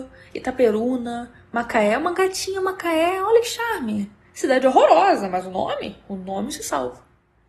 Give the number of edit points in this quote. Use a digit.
1